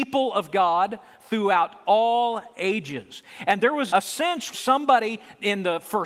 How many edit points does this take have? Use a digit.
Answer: 2